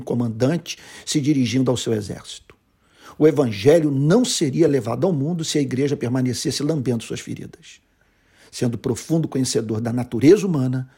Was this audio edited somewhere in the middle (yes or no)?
no